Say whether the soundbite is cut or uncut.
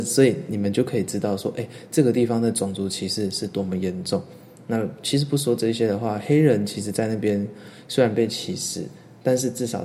uncut